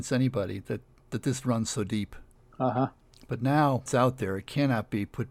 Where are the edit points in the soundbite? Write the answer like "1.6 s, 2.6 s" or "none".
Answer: none